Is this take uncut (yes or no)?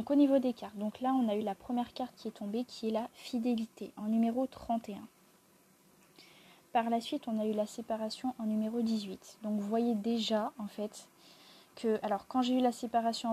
yes